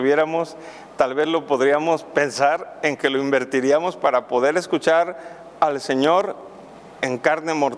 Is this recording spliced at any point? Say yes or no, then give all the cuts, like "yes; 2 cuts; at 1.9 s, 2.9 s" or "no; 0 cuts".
no; 0 cuts